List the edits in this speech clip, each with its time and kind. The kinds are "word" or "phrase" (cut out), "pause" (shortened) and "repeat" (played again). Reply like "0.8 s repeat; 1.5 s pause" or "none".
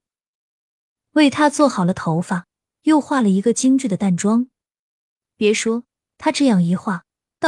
none